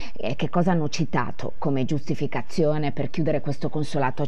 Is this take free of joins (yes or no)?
yes